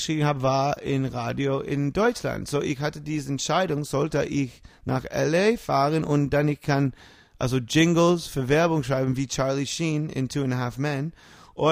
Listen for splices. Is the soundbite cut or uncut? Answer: uncut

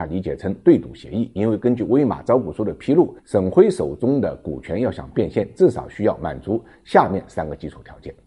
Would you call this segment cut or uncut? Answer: cut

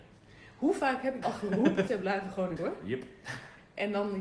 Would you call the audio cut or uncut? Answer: cut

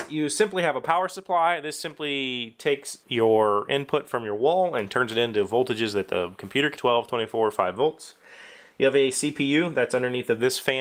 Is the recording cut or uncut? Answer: cut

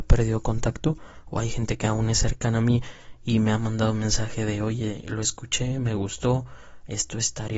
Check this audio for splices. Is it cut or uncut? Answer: uncut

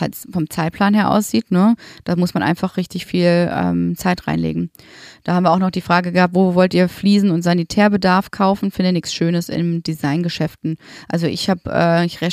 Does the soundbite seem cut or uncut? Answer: uncut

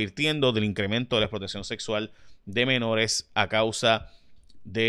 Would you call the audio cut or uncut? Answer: uncut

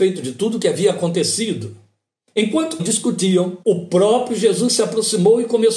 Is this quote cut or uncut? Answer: cut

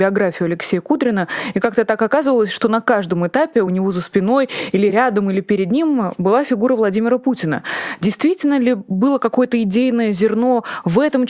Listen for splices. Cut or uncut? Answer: uncut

